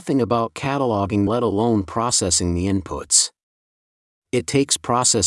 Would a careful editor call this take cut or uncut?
cut